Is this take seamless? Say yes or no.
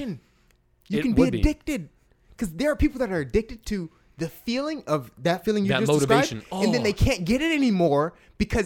yes